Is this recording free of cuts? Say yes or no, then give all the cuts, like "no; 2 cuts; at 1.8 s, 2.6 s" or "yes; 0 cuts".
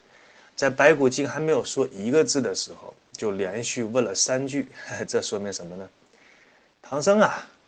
yes; 0 cuts